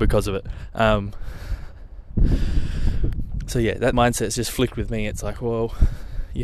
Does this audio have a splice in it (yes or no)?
yes